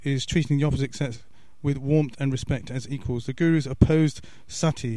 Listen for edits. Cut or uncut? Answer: uncut